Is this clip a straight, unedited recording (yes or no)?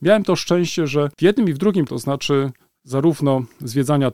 no